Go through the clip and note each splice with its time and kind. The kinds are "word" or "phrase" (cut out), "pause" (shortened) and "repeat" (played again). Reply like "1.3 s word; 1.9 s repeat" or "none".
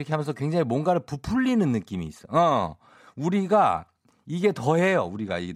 none